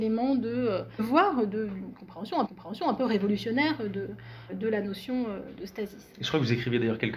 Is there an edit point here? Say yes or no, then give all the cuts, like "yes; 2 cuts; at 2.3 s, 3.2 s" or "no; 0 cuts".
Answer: yes; 3 cuts; at 1.0 s, 2.5 s, 4.5 s